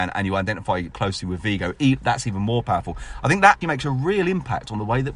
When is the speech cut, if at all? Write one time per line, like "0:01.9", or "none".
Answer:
0:00.9
0:03.6